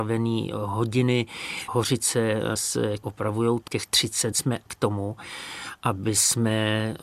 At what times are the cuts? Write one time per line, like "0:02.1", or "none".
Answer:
0:01.7
0:03.0
0:03.6
0:04.3
0:04.7